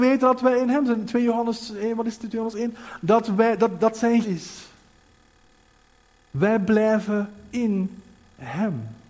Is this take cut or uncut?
cut